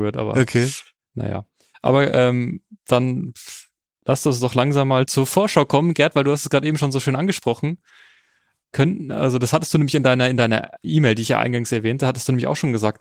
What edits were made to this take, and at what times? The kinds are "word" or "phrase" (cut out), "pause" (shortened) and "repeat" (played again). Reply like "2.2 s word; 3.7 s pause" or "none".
none